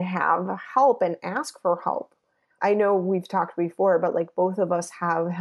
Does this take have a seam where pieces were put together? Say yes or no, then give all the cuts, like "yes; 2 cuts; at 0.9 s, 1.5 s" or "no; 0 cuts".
no; 0 cuts